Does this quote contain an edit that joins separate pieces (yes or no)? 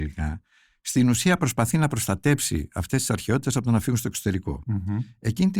no